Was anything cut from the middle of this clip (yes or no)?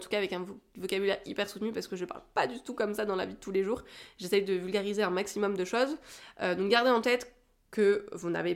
no